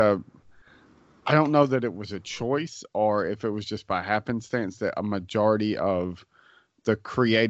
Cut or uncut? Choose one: uncut